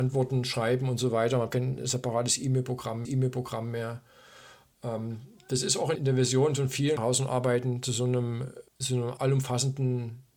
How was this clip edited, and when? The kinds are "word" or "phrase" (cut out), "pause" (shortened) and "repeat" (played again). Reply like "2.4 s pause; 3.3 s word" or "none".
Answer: 1.5 s word; 3.0 s repeat; 5.9 s word; 7.0 s phrase; 8.7 s pause; 9.2 s word

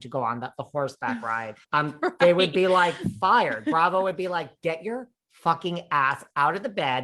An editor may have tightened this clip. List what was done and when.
1.6 s pause

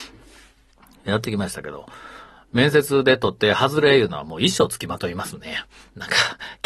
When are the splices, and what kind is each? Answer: none

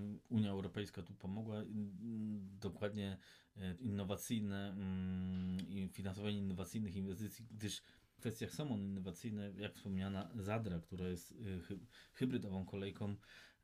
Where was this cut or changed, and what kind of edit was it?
3.8 s word; 8.2 s phrase

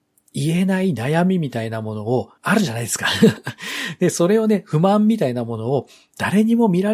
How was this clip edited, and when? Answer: 2.4 s pause

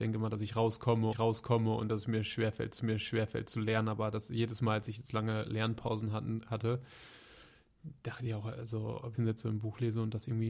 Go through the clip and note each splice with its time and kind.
1.1 s repeat; 2.8 s repeat; 9.2 s phrase

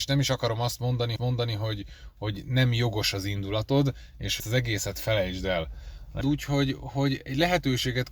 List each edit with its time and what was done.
1.2 s repeat; 4.4 s word; 6.2 s phrase

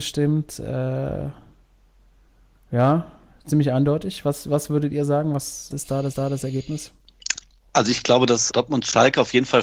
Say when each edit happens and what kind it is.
5.7 s word; 6.1 s repeat; 8.5 s word

